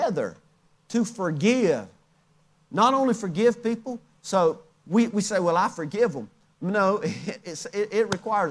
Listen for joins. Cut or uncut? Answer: uncut